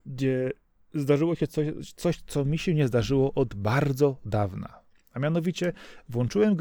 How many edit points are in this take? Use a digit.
0